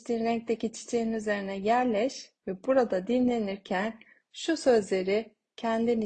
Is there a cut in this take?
yes; 1 cut; at 2.4 s

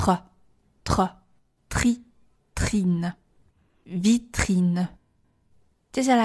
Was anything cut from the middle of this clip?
no; 0 cuts

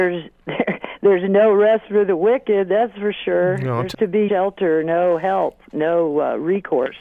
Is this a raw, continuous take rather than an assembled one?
no; 2 cuts; at 3.9 s, 4.3 s

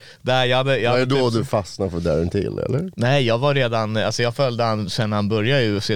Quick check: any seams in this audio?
no; 0 cuts

